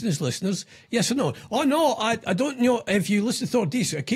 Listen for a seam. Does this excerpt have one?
no; 0 cuts

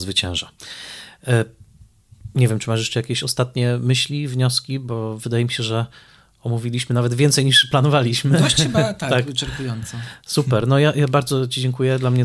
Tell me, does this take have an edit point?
no; 0 cuts

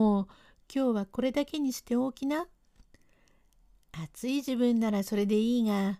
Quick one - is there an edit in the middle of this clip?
no; 0 cuts

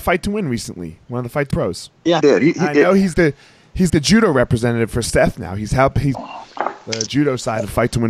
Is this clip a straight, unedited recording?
no; 6 cuts; at 1.5 s, 2.2 s, 3.1 s, 3.9 s, 6.1 s, 7.1 s

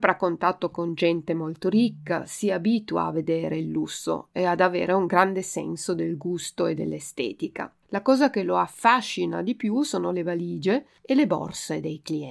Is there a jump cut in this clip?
yes; 2 cuts; at 7.8 s, 11.0 s

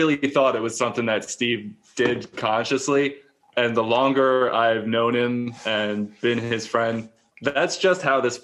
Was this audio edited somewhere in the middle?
no; 0 cuts

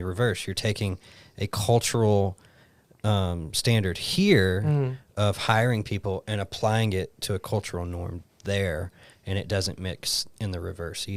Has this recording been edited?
no; 0 cuts

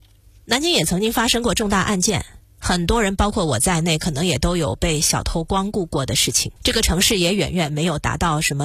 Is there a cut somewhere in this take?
yes; 1 cut; at 6.6 s

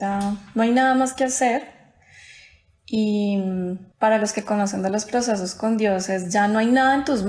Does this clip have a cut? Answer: yes; 1 cut; at 3.9 s

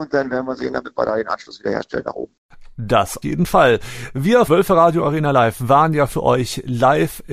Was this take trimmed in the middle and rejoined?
yes; 2 cuts; at 3.2 s, 4.5 s

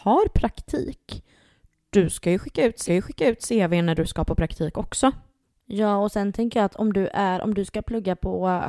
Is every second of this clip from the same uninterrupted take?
no; 1 cut; at 2.9 s

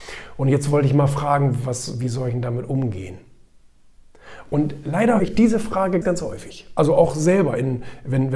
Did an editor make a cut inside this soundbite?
yes; 2 cuts; at 5.2 s, 6.0 s

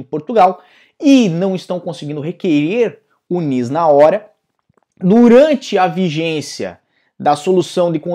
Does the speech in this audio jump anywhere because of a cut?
no; 0 cuts

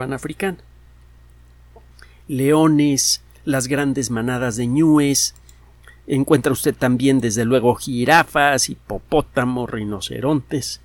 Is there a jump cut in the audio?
no; 0 cuts

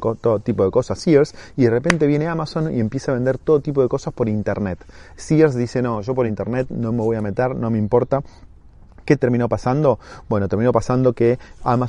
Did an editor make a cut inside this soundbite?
no; 0 cuts

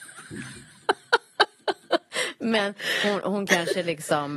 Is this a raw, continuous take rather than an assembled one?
yes; 0 cuts

